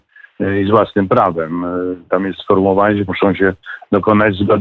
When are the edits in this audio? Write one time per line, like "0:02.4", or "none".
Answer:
0:02.4
0:03.1